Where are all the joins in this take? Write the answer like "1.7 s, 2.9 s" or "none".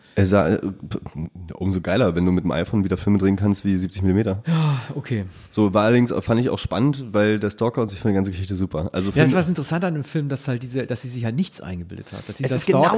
5.5 s

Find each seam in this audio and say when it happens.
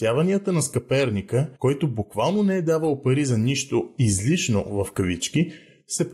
1.6 s

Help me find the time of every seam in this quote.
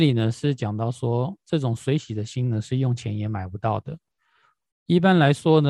none

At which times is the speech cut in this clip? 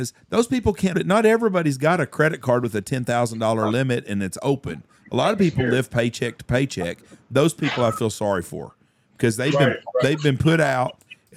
0.9 s

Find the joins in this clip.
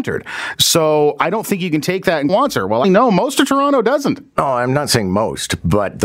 2.3 s, 2.8 s

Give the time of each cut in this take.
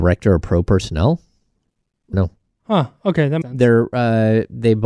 2.1 s, 3.4 s

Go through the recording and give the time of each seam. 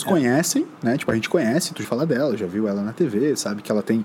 1.8 s

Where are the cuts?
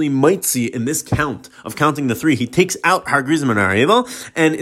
none

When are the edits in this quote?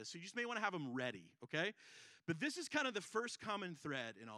none

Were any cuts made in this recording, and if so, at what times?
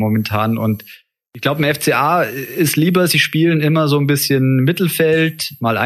none

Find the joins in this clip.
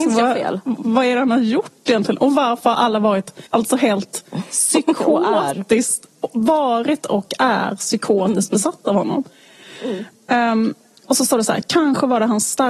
3.5 s, 11.0 s

